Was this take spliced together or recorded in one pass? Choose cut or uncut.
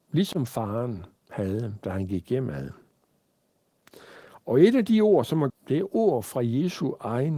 cut